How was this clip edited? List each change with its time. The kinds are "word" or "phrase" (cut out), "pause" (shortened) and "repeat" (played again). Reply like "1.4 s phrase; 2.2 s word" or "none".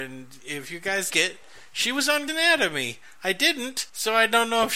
1.1 s word; 2.3 s word